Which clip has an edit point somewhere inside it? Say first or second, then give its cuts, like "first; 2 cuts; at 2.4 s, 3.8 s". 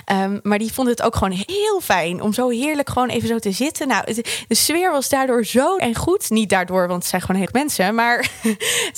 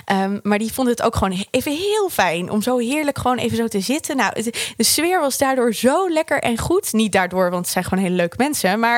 first; 3 cuts; at 1.5 s, 5.8 s, 7.5 s